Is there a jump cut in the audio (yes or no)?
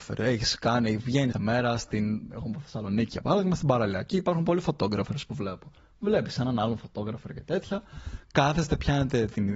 yes